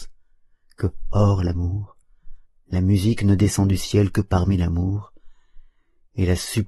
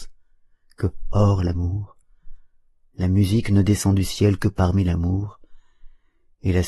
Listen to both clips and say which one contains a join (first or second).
first